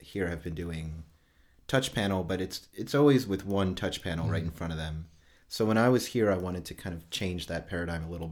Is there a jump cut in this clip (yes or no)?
no